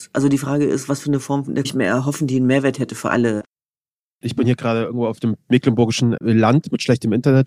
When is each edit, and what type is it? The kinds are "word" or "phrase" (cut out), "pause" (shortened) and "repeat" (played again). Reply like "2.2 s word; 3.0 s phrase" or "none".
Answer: 1.6 s phrase